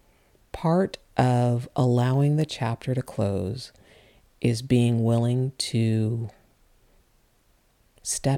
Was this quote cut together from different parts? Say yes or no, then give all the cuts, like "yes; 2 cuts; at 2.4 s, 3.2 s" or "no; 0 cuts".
no; 0 cuts